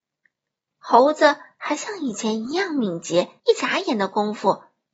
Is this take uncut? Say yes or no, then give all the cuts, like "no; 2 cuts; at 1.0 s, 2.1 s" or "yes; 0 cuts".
no; 1 cut; at 3.4 s